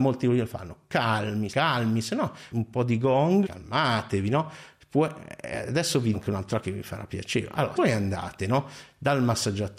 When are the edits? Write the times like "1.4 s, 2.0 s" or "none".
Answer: 1.5 s, 2.5 s, 3.4 s, 6.1 s, 6.6 s, 7.7 s